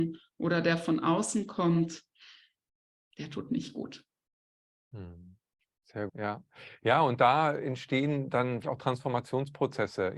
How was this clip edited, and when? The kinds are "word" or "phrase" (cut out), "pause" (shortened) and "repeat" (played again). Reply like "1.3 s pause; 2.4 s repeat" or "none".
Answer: 6.1 s word; 8.6 s word